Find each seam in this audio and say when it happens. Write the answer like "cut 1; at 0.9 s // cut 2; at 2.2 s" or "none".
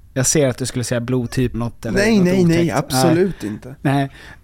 cut 1; at 1.5 s

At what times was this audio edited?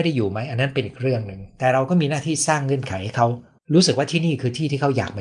cut 1; at 3.6 s

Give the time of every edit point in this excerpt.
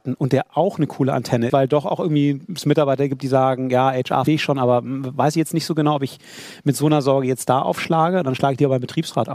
cut 1; at 1.5 s // cut 2; at 4.3 s

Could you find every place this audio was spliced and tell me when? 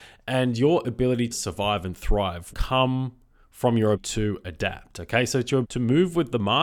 cut 1; at 1.3 s // cut 2; at 2.5 s // cut 3; at 3.9 s // cut 4; at 5.6 s

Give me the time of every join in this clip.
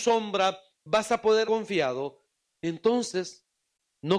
cut 1; at 1.4 s

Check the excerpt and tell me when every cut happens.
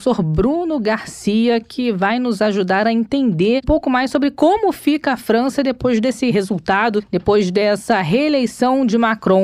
cut 1; at 3.6 s

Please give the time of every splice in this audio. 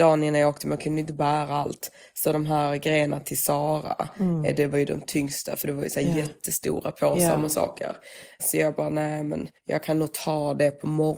cut 1; at 9.6 s

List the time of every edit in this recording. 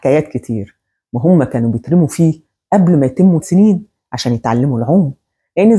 cut 1; at 3.4 s

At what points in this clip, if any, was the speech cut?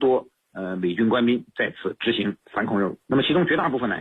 cut 1; at 2.4 s // cut 2; at 3.0 s

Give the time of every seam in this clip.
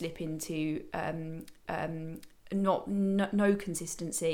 cut 1; at 1.6 s

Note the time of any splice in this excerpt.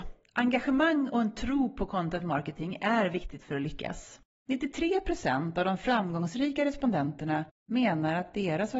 none

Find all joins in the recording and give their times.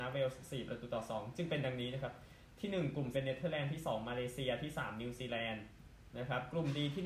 cut 1; at 3.1 s

